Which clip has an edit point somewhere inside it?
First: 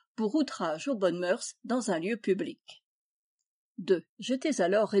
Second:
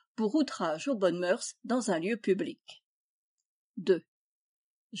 first; 1 cut; at 4.1 s

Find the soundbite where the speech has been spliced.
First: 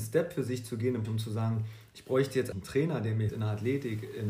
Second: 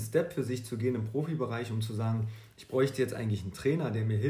first; 3 cuts; at 1.0 s, 2.5 s, 3.3 s

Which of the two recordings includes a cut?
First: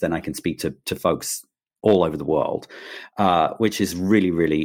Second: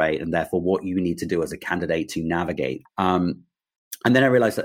second; 1 cut; at 2.9 s

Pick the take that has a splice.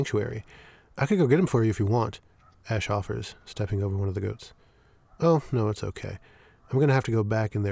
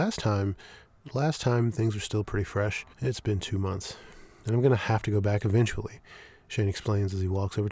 second; 1 cut; at 2.9 s

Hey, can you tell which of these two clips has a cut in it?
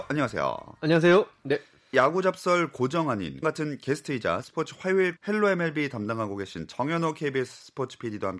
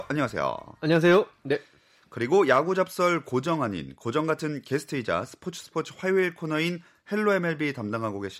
first; 4 cuts; at 1.9 s, 3.4 s, 4.4 s, 5.2 s

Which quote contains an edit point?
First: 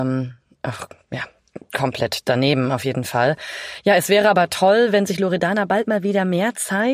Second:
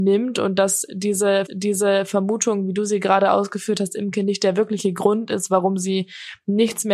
second; 1 cut; at 1.5 s

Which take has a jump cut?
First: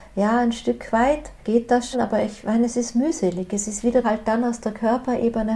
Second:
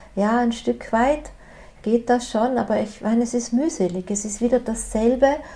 first; 3 cuts; at 1.4 s, 1.9 s, 4.0 s

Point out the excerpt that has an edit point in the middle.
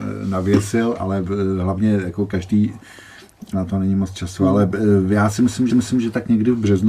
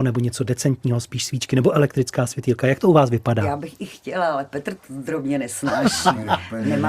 first; 2 cuts; at 3.5 s, 5.7 s

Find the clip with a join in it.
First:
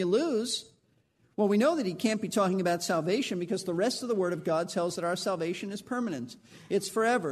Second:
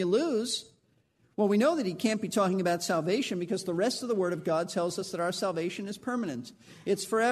first; 1 cut; at 5.0 s

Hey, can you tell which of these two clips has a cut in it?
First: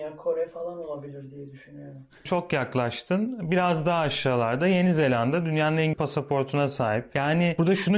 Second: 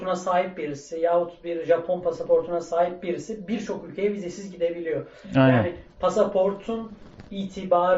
first; 1 cut; at 5.9 s

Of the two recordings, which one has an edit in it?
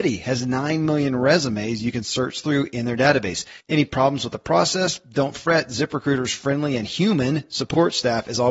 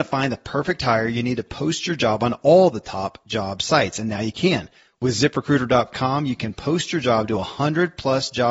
first; 1 cut; at 3.6 s

